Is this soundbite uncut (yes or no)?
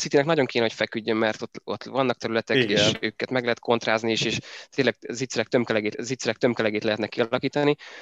no